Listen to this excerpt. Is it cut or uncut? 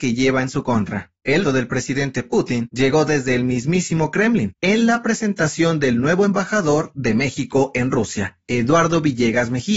cut